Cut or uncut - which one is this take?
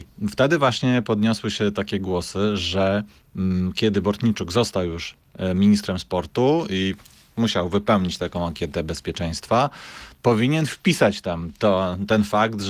uncut